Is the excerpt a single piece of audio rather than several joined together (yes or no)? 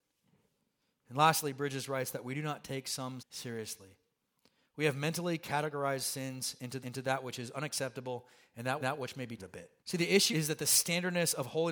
no